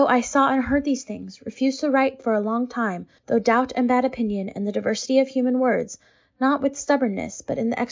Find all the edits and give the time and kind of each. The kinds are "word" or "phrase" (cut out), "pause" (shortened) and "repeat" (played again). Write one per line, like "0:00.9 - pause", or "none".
none